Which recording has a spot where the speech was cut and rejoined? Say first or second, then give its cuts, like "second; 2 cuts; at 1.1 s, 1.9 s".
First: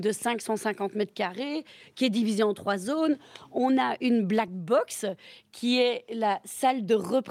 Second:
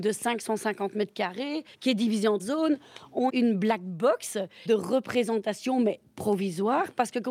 second; 4 cuts; at 1.7 s, 2.4 s, 3.3 s, 4.7 s